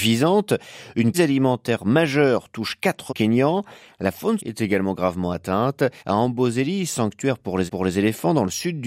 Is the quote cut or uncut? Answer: cut